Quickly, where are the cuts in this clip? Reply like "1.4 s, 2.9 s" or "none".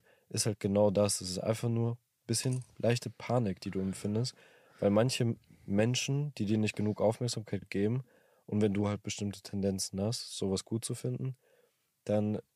none